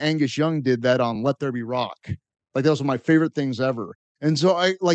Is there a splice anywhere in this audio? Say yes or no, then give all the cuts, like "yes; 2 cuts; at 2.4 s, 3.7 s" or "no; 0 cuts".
no; 0 cuts